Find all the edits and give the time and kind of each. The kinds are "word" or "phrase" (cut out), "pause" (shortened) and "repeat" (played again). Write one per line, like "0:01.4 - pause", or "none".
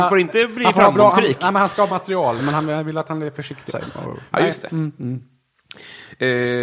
0:01.9 - word
0:02.4 - word
0:03.7 - word